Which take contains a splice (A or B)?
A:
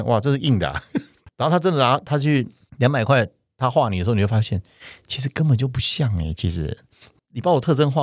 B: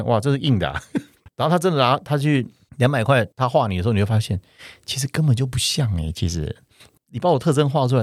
B